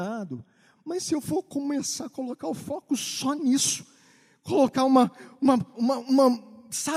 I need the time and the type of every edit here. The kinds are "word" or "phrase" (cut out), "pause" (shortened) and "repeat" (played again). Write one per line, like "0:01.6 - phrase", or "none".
0:05.7 - word